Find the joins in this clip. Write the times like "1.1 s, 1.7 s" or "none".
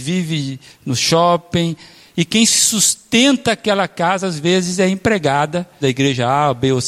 2.4 s, 5.8 s